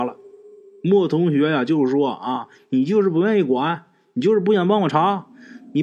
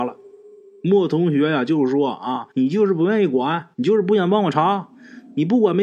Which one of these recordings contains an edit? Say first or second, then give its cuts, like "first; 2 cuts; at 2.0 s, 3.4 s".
second; 2 cuts; at 2.5 s, 3.7 s